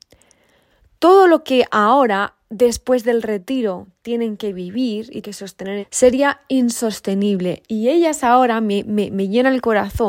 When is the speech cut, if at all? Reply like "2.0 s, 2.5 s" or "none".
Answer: 5.2 s, 5.8 s